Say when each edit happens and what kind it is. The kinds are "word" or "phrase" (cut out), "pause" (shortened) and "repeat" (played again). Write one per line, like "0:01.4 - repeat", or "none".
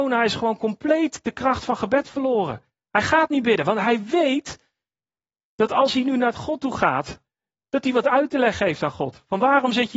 none